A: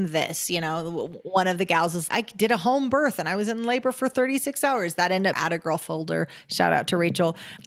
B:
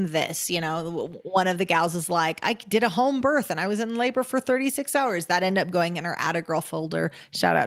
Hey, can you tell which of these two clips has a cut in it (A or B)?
A